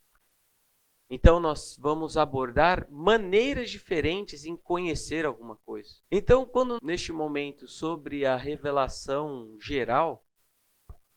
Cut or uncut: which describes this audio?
cut